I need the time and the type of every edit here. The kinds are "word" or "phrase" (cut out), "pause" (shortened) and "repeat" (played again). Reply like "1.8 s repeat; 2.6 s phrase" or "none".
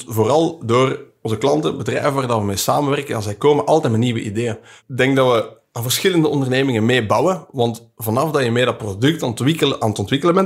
none